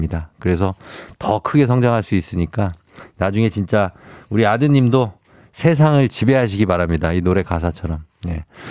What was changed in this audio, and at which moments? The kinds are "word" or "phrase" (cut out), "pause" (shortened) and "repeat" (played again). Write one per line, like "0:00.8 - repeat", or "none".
none